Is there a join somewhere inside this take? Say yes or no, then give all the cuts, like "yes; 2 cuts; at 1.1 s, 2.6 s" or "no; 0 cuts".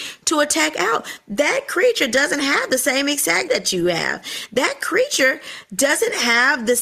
yes; 1 cut; at 3.5 s